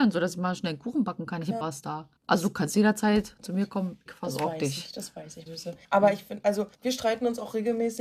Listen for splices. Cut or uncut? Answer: cut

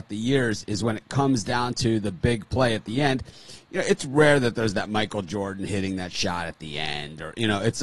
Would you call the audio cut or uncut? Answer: uncut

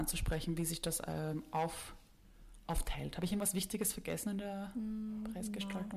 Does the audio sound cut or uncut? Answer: uncut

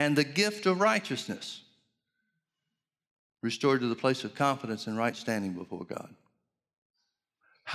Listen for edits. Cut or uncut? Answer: uncut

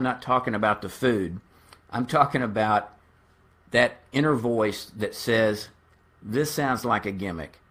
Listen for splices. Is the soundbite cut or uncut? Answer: uncut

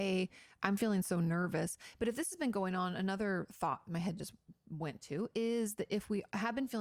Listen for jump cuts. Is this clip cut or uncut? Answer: uncut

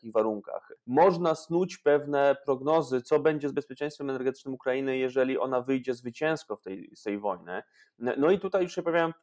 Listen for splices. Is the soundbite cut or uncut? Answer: uncut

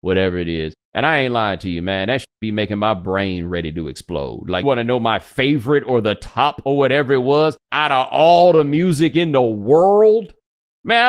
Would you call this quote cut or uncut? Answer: cut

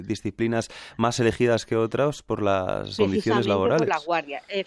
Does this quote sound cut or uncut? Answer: cut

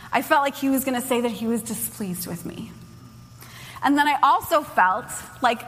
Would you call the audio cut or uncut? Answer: uncut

